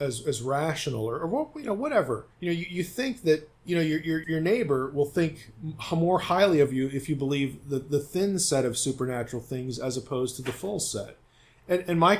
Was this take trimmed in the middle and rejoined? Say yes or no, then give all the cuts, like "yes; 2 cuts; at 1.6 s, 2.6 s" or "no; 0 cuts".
yes; 3 cuts; at 2.3 s, 3.5 s, 4.2 s